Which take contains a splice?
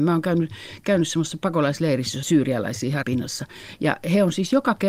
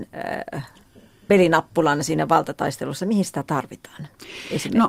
first; 2 cuts; at 2.2 s, 3.0 s

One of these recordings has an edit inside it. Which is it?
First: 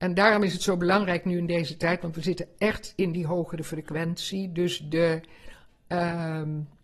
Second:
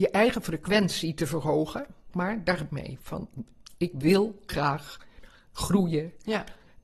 second; 3 cuts; at 2.1 s, 2.7 s, 4.5 s

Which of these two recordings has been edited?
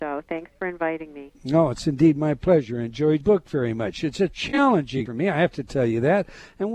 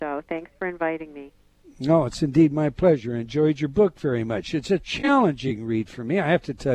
first; 3 cuts; at 1.3 s, 3.2 s, 5.1 s

